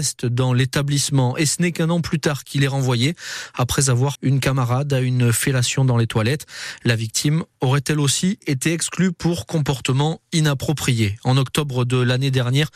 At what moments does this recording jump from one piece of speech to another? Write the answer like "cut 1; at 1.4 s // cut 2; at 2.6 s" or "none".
cut 1; at 4.2 s

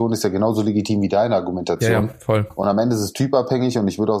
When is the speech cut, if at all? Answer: none

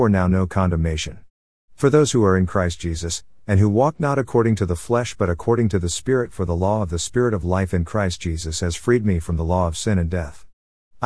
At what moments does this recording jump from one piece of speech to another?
none

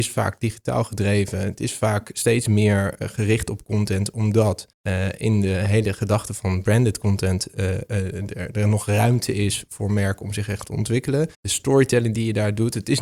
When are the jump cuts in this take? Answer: cut 1; at 4.7 s // cut 2; at 11.3 s

